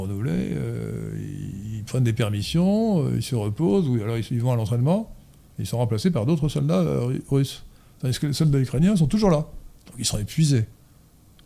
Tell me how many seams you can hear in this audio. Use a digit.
0